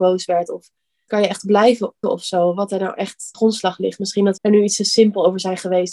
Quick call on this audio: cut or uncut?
cut